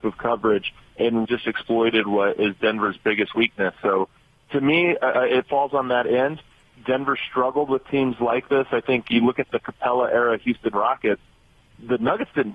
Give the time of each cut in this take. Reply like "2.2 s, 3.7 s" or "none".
1.2 s